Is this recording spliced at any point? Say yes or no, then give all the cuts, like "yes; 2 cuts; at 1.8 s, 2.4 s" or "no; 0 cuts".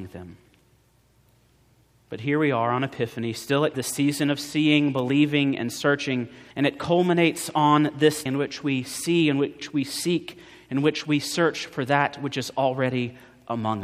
yes; 3 cuts; at 3.7 s, 6.5 s, 8.3 s